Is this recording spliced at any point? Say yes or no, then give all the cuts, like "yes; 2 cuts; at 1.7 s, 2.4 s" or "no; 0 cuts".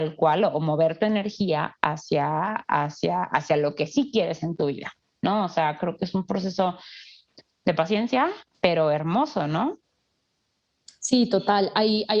no; 0 cuts